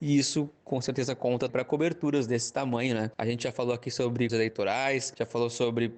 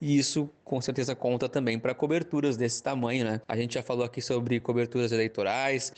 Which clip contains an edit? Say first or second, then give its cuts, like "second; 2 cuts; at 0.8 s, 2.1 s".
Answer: first; 2 cuts; at 1.5 s, 4.3 s